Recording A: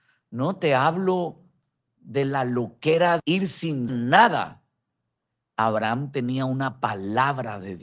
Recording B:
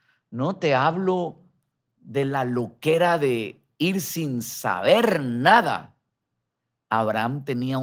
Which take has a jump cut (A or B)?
A